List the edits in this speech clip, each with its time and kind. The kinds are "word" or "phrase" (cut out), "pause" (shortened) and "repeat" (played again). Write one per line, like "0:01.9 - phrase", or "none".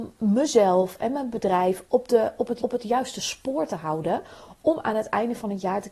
0:01.8 - word
0:02.6 - repeat